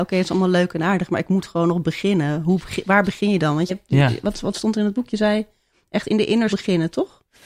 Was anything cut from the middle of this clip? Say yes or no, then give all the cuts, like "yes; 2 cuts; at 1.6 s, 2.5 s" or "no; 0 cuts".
yes; 2 cuts; at 3.7 s, 6.5 s